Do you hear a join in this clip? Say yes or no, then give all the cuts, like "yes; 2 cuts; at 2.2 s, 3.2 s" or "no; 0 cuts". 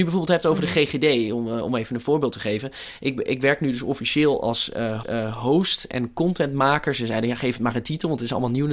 yes; 1 cut; at 5.0 s